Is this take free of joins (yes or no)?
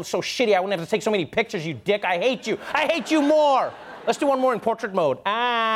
yes